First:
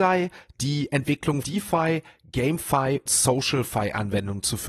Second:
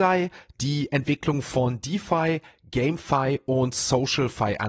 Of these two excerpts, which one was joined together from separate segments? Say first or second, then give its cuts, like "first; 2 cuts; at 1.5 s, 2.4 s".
first; 2 cuts; at 1.4 s, 3.1 s